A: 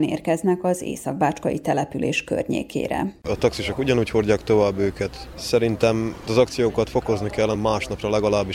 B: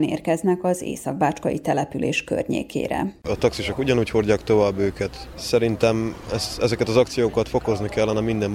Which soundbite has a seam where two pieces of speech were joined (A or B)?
A